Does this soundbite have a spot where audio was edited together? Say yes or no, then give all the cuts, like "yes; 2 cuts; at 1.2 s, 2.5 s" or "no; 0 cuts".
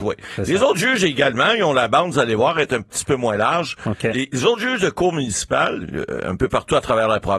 yes; 1 cut; at 5.8 s